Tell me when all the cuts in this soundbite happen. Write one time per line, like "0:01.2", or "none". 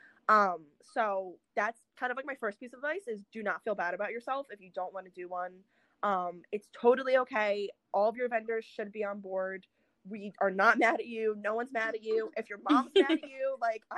none